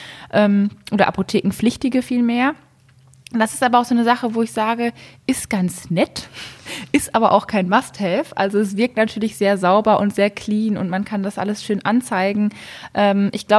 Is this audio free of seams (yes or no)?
yes